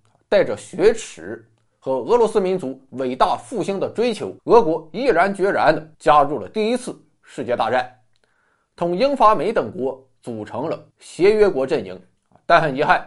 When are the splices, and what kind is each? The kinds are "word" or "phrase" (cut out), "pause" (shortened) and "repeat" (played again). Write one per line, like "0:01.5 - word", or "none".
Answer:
0:04.4 - pause
0:05.9 - pause
0:10.9 - pause
0:12.2 - pause